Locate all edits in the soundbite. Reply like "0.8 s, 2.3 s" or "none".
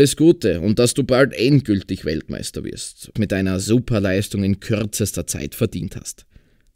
3.2 s